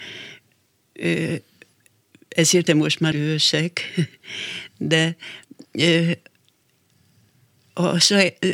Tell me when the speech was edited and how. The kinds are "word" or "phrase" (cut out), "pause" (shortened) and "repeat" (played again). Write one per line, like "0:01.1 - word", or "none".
0:02.7 - word
0:03.1 - word